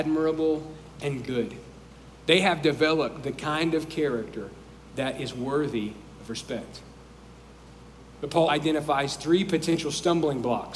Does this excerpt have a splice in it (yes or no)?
yes